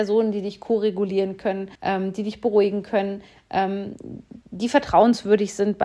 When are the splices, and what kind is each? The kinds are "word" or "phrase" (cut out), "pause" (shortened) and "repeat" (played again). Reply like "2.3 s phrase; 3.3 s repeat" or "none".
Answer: 1.7 s pause; 4.4 s pause